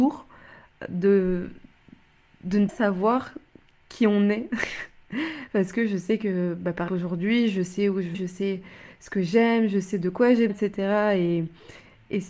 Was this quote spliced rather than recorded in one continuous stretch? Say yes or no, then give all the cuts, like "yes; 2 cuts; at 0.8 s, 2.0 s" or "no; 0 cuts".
yes; 4 cuts; at 2.7 s, 6.9 s, 8.1 s, 10.5 s